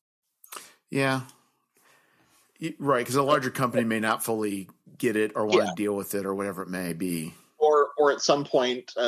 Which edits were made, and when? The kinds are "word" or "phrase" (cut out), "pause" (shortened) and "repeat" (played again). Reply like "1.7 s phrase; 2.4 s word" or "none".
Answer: none